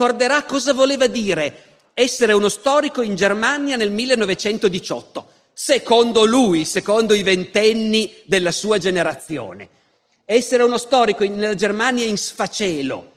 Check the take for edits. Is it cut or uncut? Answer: uncut